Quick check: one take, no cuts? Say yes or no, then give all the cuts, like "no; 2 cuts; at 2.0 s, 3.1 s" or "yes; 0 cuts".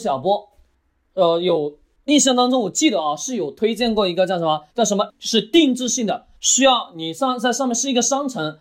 no; 3 cuts; at 4.7 s, 5.1 s, 6.4 s